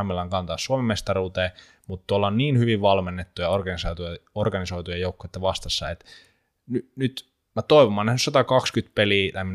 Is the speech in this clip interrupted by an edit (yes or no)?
no